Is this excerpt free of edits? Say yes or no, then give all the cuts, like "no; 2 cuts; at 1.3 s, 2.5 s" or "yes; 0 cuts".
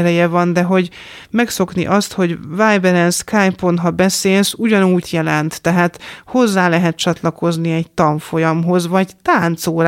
no; 1 cut; at 5.0 s